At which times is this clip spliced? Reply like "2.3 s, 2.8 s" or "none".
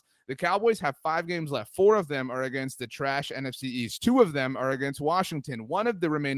none